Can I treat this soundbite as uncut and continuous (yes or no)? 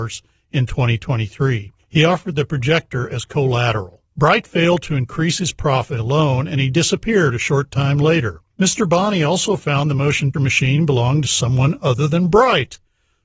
no